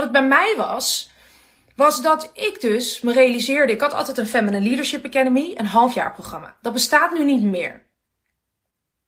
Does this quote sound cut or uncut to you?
uncut